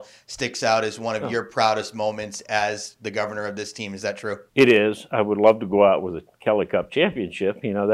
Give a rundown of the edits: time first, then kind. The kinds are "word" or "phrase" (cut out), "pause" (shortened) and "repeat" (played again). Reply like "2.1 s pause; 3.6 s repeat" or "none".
4.5 s pause